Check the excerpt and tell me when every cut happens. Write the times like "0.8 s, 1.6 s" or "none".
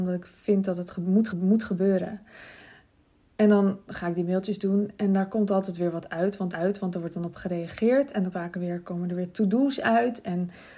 1.3 s, 6.5 s, 8.3 s